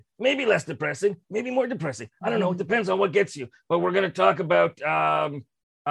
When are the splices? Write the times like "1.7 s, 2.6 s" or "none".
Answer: none